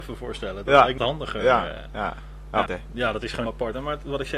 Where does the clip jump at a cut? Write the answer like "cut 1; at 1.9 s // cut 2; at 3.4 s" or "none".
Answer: cut 1; at 1.0 s // cut 2; at 2.7 s // cut 3; at 3.5 s